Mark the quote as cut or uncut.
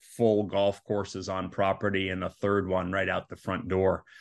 uncut